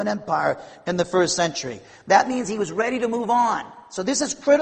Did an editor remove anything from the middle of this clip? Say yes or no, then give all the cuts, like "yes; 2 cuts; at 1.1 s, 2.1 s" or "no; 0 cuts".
no; 0 cuts